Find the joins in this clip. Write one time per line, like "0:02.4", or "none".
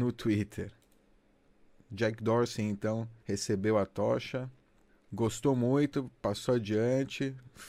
0:03.2
0:04.9